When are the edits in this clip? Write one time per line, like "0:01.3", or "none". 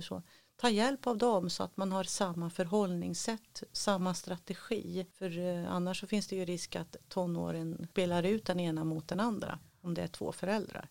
none